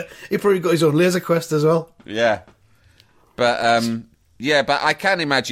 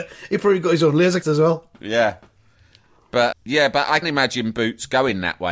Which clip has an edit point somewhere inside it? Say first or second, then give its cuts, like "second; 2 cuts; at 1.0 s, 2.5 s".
second; 3 cuts; at 1.2 s, 3.3 s, 4.0 s